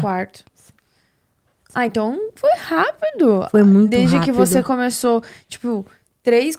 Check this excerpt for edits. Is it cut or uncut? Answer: uncut